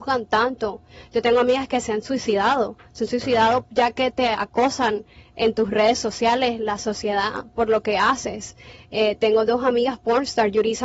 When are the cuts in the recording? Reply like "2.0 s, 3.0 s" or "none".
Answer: none